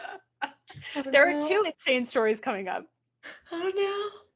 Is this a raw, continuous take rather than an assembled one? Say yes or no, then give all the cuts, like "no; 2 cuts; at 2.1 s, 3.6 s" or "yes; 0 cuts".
yes; 0 cuts